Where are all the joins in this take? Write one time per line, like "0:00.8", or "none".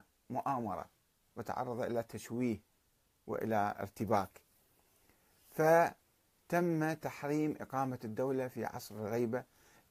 none